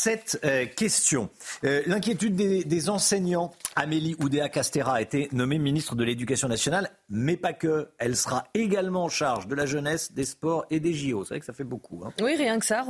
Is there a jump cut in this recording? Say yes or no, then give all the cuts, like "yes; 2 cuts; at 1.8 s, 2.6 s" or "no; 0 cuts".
no; 0 cuts